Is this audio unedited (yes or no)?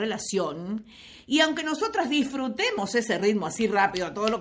yes